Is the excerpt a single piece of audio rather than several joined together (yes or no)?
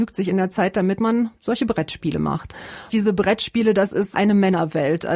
no